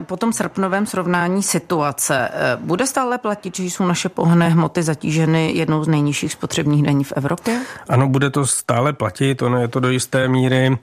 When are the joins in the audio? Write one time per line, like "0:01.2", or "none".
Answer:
none